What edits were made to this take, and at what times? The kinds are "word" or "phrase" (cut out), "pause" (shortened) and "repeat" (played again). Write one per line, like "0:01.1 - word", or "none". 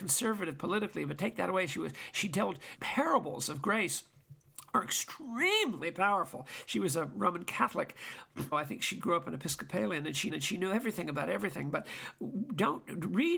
0:02.8 - word
0:08.5 - word
0:10.3 - repeat